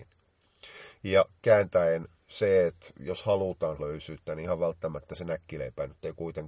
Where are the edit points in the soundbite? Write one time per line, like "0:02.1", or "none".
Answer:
0:03.8